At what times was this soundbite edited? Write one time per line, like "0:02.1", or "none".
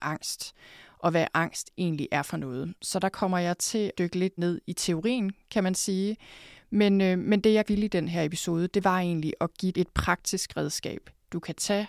0:04.0
0:04.4
0:07.7
0:09.7